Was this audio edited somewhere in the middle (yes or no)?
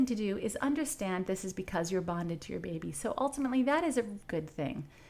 yes